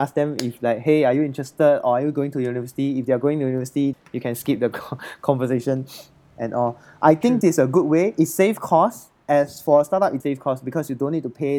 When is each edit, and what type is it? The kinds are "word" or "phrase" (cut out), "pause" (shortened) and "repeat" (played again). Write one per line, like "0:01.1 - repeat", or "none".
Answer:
0:03.9 - word
0:07.4 - word
0:10.2 - word